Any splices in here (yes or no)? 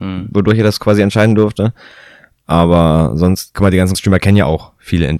yes